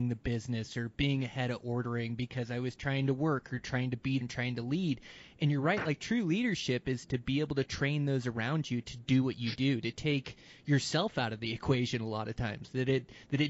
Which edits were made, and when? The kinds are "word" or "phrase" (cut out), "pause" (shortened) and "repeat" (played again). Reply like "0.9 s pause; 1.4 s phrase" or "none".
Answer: 4.2 s word